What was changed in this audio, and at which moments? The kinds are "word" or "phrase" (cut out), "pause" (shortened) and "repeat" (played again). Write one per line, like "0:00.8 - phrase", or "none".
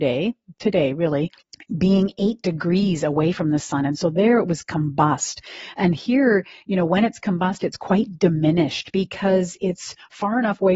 0:01.4 - pause